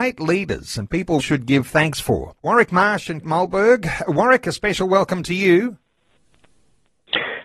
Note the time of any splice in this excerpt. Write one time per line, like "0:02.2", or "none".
0:01.2
0:02.4
0:03.2

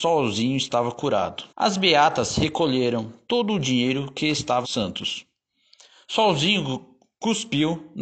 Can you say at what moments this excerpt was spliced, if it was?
0:01.5
0:04.6

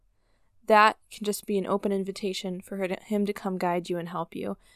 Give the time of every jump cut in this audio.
0:01.0

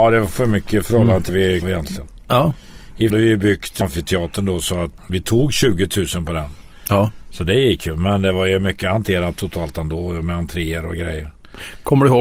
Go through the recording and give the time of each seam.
0:01.3
0:01.6
0:03.1
0:03.8
0:05.0

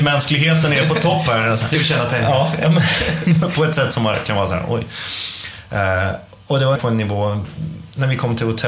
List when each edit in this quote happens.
0:01.7
0:06.8

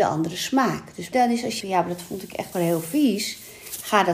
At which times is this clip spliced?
0:01.1
0:01.6
0:02.5

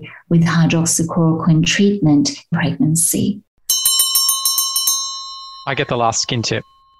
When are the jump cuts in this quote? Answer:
0:02.5
0:05.6

